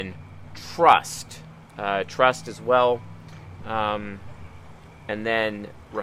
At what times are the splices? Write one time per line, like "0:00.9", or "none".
none